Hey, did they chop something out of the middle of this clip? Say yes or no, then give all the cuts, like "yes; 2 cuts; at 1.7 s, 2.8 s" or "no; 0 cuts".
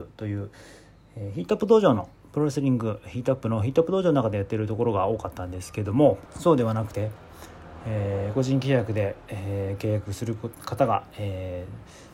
yes; 1 cut; at 6.3 s